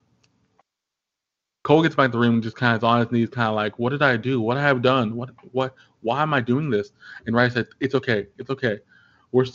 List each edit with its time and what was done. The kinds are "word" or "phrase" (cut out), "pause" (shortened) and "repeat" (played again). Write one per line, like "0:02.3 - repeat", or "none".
none